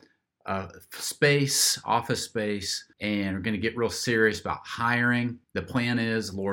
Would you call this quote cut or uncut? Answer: cut